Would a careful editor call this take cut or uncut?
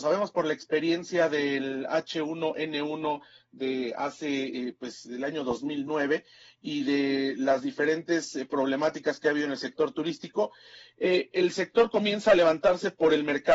uncut